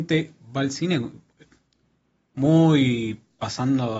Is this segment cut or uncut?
uncut